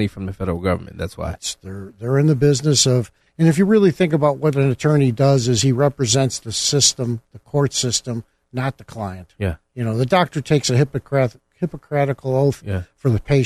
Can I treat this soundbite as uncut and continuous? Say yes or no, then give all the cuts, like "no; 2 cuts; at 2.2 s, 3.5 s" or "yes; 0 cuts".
yes; 0 cuts